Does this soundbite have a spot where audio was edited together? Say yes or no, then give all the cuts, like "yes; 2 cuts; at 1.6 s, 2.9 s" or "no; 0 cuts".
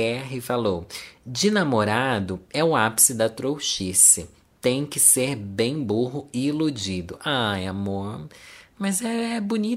no; 0 cuts